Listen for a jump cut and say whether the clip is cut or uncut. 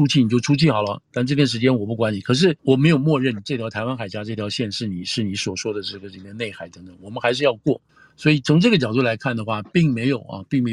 cut